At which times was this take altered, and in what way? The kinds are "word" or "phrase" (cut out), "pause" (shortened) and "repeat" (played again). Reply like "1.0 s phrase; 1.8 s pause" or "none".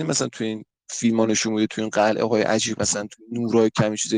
2.8 s word